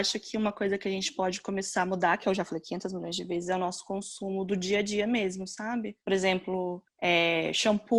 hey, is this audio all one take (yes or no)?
no